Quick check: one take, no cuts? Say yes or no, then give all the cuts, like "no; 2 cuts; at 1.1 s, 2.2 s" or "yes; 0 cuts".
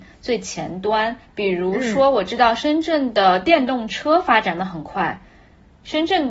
no; 1 cut; at 1.2 s